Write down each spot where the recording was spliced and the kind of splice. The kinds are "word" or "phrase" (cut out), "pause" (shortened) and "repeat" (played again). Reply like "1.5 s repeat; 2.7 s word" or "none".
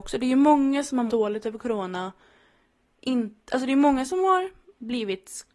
1.1 s word